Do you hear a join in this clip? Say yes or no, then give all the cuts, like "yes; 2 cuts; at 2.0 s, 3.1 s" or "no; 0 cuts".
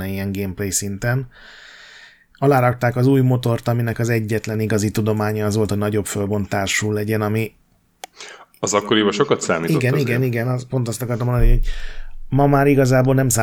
no; 0 cuts